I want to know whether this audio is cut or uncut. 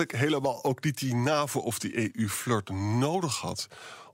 uncut